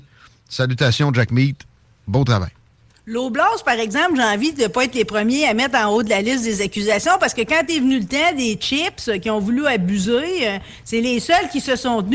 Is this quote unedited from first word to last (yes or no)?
yes